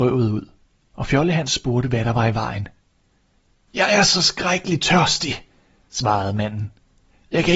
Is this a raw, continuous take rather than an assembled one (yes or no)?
yes